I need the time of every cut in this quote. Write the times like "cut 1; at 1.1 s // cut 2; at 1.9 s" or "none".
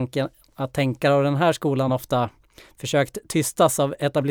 none